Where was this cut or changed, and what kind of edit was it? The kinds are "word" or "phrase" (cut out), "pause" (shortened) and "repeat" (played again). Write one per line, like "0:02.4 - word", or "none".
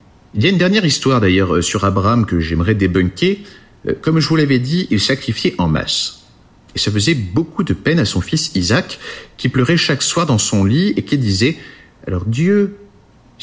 none